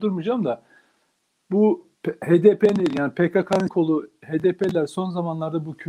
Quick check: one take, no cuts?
no; 2 cuts; at 2.0 s, 3.7 s

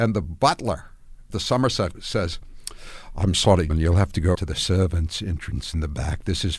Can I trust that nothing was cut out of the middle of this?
no; 4 cuts; at 1.3 s, 1.9 s, 3.7 s, 4.3 s

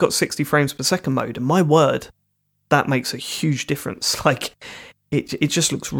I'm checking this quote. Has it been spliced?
no; 0 cuts

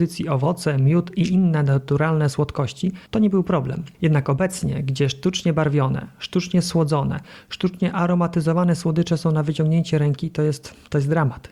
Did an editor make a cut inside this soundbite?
yes; 2 cuts; at 3.1 s, 3.9 s

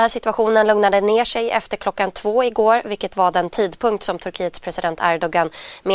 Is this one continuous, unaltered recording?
yes; 0 cuts

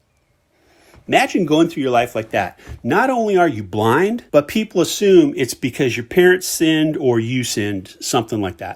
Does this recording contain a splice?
yes; 1 cut; at 4.3 s

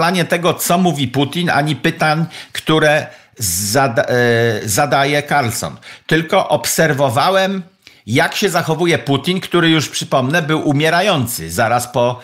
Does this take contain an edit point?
no; 0 cuts

